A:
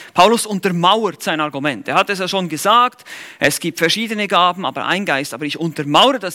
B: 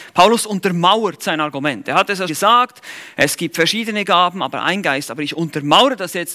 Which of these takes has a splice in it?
B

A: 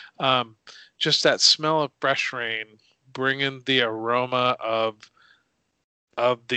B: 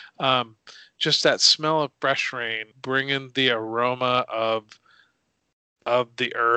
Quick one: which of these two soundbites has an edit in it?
B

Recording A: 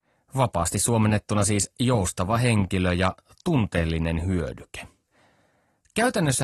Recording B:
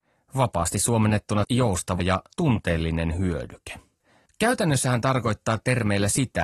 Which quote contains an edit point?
B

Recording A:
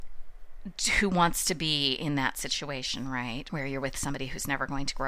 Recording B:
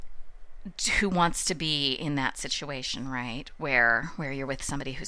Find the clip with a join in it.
A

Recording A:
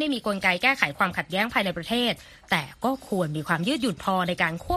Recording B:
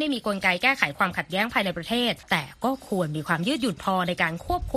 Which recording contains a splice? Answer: B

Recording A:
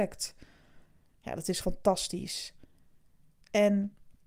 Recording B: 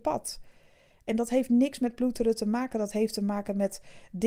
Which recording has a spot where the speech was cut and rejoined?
A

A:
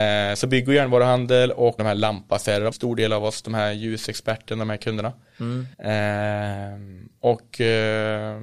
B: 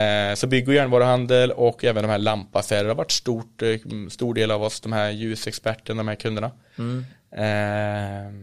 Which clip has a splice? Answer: A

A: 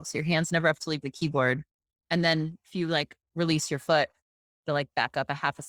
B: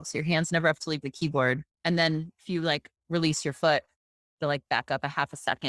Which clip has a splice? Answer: B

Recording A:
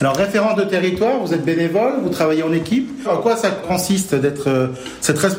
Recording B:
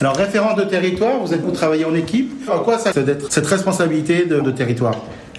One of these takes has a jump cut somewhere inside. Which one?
B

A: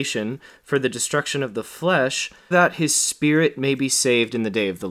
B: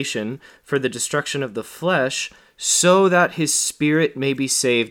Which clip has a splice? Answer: A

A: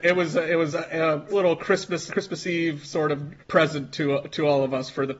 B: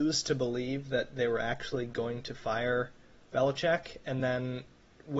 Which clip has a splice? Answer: A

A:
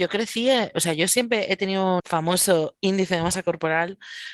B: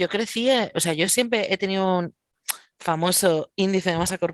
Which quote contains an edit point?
A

